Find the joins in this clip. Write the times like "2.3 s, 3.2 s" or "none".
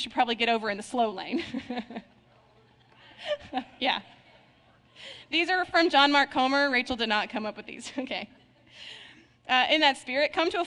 none